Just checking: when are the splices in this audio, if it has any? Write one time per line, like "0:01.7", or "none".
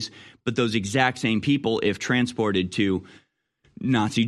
none